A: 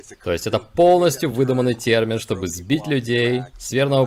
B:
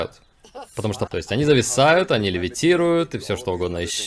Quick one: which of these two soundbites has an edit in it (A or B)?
B